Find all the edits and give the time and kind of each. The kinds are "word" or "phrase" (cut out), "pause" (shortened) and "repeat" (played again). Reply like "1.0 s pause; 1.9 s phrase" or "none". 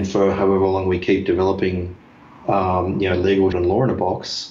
3.5 s word